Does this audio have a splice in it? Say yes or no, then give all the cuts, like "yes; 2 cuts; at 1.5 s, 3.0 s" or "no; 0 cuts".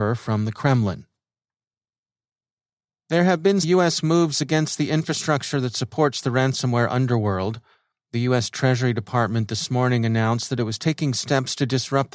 yes; 1 cut; at 3.6 s